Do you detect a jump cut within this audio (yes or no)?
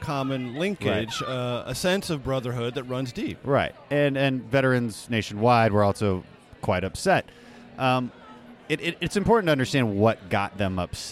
no